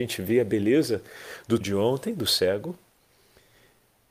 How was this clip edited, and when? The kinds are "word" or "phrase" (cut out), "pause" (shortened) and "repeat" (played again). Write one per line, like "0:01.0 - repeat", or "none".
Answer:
0:01.6 - word

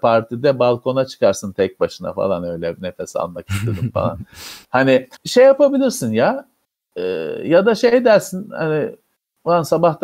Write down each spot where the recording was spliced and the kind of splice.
0:05.2 - pause

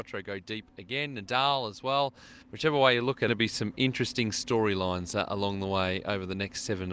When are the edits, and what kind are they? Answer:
0:02.4 - pause
0:03.3 - phrase

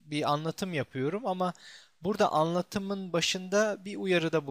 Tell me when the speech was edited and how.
none

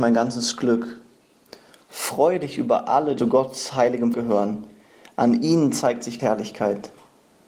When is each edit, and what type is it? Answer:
0:03.2 - word
0:04.1 - word
0:06.2 - word

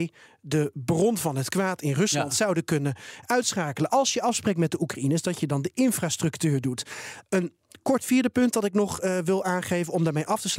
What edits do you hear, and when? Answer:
none

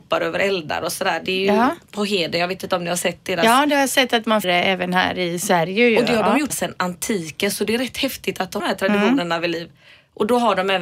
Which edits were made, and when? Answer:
0:04.4 - word
0:06.5 - word
0:08.6 - phrase

